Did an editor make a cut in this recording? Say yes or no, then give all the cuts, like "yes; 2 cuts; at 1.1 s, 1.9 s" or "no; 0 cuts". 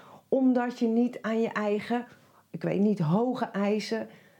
no; 0 cuts